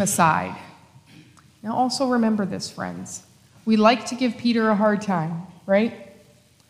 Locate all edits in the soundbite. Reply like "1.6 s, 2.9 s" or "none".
none